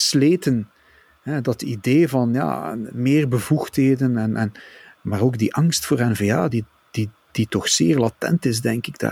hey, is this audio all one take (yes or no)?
yes